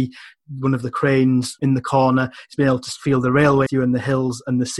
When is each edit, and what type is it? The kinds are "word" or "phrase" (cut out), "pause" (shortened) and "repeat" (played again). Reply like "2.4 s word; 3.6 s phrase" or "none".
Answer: 1.6 s word; 3.7 s word